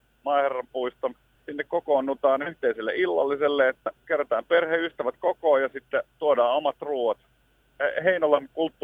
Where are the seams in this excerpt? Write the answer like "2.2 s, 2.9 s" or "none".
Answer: 1.4 s, 4.0 s, 6.1 s